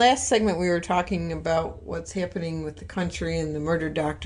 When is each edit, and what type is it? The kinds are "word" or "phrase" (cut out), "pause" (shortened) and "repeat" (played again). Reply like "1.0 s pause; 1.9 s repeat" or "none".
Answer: none